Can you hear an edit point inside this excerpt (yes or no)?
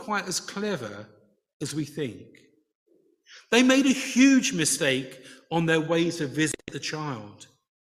no